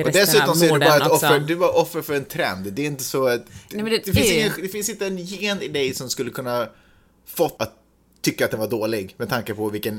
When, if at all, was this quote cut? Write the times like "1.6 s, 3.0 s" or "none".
7.6 s